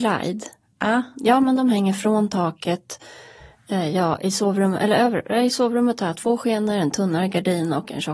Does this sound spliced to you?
no; 0 cuts

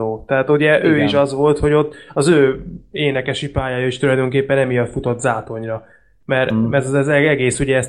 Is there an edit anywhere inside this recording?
no; 0 cuts

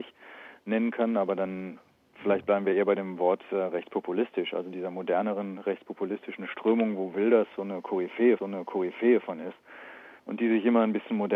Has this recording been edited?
yes; 2 cuts; at 8.4 s, 10.2 s

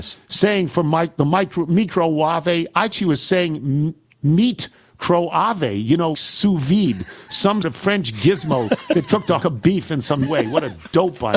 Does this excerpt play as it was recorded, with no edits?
no; 5 cuts; at 2.9 s, 6.1 s, 7.6 s, 9.4 s, 10.3 s

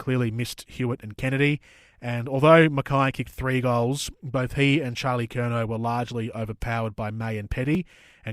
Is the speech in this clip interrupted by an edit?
no; 0 cuts

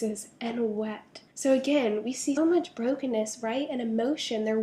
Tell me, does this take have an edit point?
yes; 2 cuts; at 1.3 s, 2.4 s

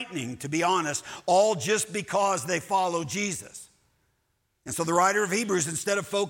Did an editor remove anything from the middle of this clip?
no; 0 cuts

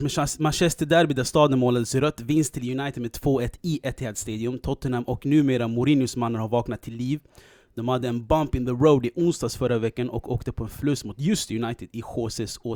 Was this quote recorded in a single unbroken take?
yes; 0 cuts

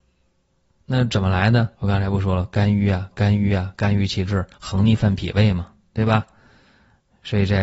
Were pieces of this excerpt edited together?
yes; 3 cuts; at 1.7 s, 3.1 s, 4.5 s

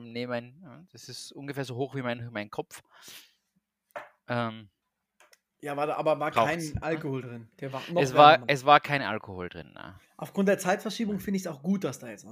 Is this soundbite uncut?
yes; 0 cuts

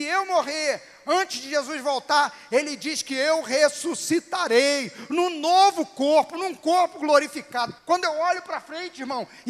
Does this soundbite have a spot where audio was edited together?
yes; 1 cut; at 7.8 s

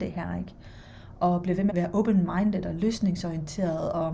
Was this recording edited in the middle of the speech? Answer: yes; 1 cut; at 1.7 s

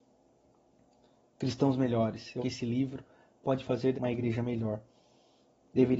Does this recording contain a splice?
yes; 2 cuts; at 2.4 s, 3.9 s

